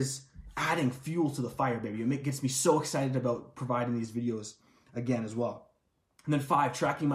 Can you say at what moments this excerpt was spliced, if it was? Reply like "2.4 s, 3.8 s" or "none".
none